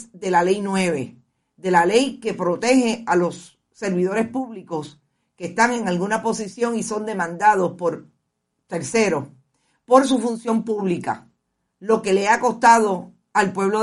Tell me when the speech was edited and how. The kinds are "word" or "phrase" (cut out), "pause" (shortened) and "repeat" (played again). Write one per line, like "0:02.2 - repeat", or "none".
none